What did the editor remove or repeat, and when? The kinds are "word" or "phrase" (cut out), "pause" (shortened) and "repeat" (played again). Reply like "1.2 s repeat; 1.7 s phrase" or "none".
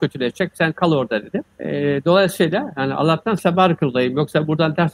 1.5 s pause